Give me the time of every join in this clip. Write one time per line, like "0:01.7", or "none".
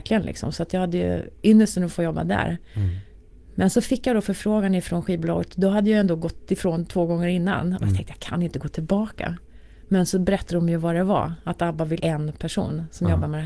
0:12.0